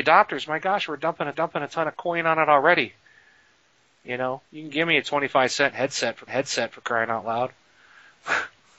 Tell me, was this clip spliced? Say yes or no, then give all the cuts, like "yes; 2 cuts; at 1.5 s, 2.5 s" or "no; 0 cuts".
yes; 3 cuts; at 1.3 s, 4.5 s, 6.3 s